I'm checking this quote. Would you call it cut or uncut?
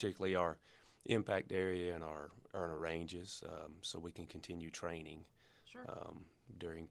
uncut